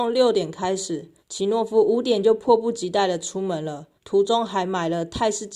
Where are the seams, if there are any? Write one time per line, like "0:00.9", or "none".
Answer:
0:01.2
0:04.0